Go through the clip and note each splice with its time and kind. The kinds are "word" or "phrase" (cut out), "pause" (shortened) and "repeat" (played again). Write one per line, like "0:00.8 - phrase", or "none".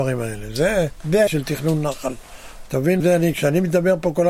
0:01.3 - word
0:03.0 - word